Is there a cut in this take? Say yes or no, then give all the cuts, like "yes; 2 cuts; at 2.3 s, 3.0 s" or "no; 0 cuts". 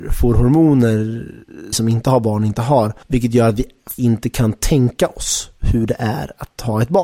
yes; 3 cuts; at 1.7 s, 3.0 s, 4.0 s